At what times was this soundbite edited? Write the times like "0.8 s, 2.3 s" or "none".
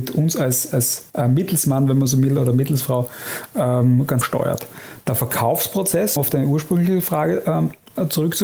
1.1 s, 4.2 s, 6.2 s